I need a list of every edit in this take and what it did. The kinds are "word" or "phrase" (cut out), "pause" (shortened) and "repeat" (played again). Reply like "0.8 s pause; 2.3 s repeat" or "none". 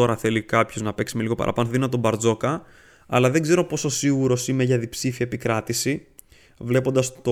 none